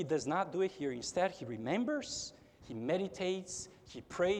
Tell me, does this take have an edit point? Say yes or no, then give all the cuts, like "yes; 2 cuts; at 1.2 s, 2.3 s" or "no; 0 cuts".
yes; 1 cut; at 2.6 s